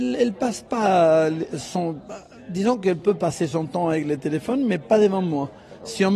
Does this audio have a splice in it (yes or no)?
no